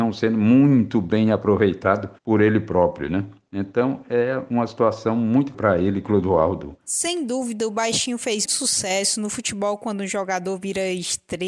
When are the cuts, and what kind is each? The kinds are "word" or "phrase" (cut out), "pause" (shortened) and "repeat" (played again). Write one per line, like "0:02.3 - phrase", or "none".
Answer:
0:02.2 - pause
0:05.5 - word
0:08.5 - word